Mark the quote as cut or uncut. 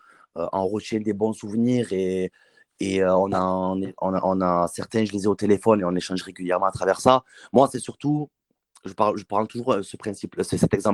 uncut